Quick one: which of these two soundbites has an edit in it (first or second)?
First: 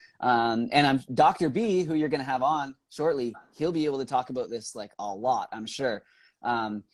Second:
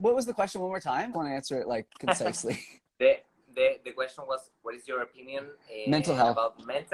second